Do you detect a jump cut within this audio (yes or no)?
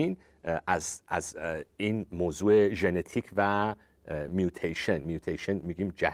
no